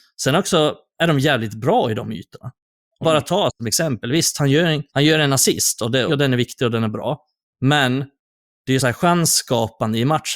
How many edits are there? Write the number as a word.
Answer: five